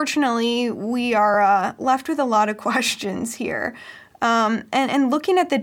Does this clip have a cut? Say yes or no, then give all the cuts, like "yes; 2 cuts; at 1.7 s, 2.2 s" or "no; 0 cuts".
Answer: no; 0 cuts